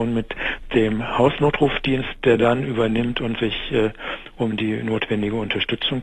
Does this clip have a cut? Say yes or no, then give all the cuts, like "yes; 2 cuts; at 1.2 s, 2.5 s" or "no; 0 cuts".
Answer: no; 0 cuts